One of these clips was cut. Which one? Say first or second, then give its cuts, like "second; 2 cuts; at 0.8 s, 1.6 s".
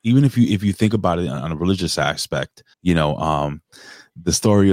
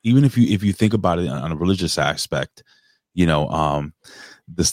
first; 1 cut; at 2.7 s